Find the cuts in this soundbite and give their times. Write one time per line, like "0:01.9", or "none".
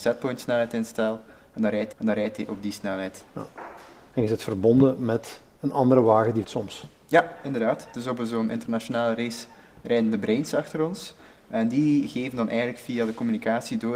0:01.9
0:06.4